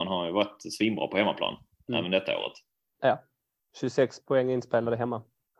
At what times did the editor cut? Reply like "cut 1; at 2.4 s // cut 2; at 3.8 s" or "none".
none